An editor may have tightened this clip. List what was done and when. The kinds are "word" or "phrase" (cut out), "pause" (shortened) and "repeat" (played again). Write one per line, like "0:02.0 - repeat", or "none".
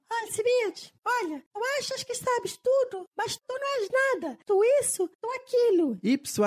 none